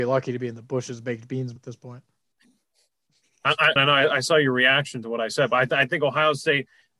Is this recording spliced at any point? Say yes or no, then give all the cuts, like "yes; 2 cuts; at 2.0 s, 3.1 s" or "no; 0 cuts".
yes; 2 cuts; at 1.6 s, 3.8 s